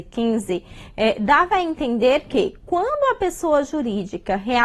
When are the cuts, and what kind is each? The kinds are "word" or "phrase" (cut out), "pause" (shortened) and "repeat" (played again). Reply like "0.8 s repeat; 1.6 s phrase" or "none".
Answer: none